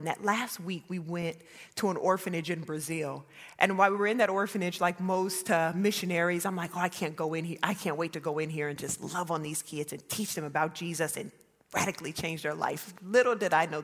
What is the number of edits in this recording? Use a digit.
0